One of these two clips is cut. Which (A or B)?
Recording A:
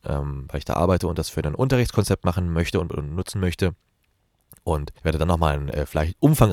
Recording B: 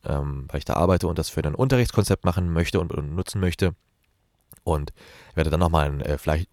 A